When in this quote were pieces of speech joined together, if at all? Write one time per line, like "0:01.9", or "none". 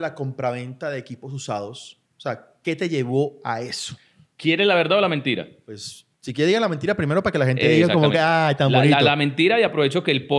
0:02.1
0:06.1